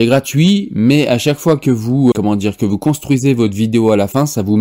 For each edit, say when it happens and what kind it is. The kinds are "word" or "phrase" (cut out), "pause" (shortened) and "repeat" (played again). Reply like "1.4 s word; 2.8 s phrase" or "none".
2.1 s word